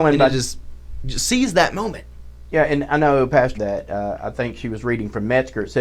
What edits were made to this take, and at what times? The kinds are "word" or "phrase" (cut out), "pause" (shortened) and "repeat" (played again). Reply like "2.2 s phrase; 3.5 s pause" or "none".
3.5 s phrase